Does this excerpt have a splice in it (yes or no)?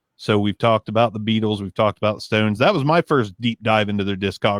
no